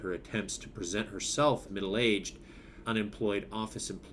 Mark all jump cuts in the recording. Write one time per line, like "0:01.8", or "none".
0:01.7
0:02.8

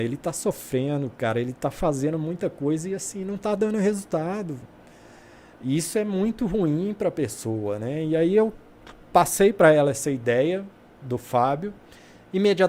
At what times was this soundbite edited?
none

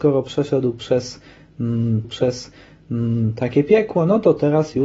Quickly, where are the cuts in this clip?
0:02.0

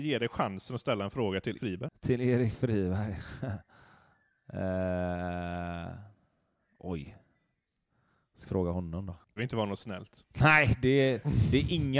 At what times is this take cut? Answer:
0:01.5
0:08.4
0:09.4

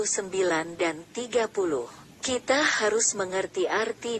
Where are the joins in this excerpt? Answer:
0:02.1

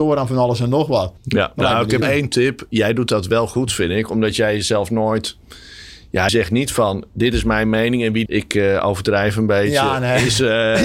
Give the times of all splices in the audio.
0:01.2
0:02.0
0:06.3
0:08.3

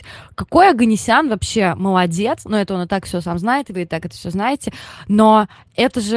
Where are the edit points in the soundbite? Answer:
none

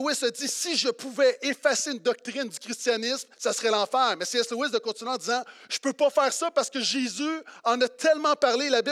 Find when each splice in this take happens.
0:03.3

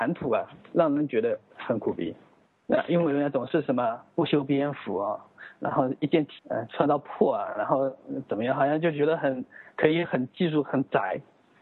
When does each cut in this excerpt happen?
0:02.5
0:06.4

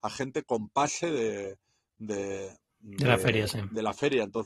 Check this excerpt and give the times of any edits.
none

